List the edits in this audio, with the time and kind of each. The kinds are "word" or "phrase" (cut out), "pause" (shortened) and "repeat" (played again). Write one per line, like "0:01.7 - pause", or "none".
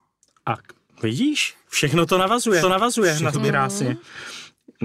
0:02.6 - repeat
0:03.3 - word